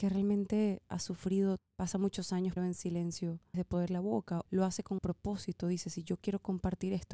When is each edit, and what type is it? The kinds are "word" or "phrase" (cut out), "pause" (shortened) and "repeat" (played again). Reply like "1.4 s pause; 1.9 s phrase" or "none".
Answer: 1.6 s word; 2.6 s word; 3.5 s word; 3.9 s word; 4.5 s word; 5.0 s word